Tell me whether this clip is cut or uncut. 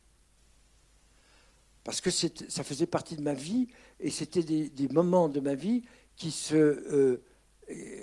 uncut